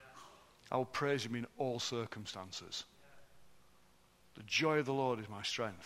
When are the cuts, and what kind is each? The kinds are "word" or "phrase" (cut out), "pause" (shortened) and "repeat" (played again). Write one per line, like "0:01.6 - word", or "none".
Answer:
none